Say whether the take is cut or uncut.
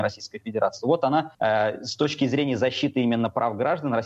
cut